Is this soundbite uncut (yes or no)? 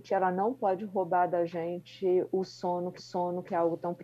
no